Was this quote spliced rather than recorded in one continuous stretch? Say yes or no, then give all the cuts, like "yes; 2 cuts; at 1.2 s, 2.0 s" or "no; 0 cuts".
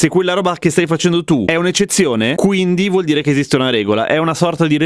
no; 0 cuts